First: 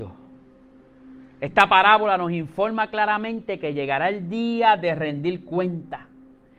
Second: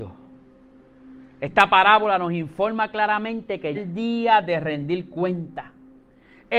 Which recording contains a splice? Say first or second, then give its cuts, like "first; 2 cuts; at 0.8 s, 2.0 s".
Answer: second; 1 cut; at 3.7 s